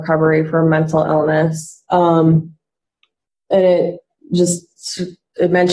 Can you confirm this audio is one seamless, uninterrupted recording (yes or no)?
yes